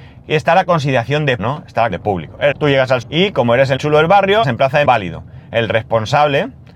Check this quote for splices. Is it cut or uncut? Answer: cut